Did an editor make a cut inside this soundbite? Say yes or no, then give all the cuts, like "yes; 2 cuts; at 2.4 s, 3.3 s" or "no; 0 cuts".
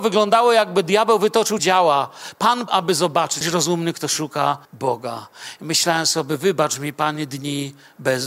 yes; 4 cuts; at 1.6 s, 2.7 s, 3.4 s, 4.6 s